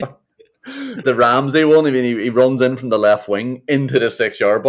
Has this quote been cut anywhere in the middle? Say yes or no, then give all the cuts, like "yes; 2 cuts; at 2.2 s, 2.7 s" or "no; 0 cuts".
yes; 1 cut; at 1.0 s